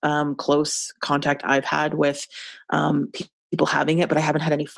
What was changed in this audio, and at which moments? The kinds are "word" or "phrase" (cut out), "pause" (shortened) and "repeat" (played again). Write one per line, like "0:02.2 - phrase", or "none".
none